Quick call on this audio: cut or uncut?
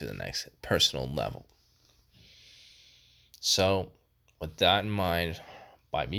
uncut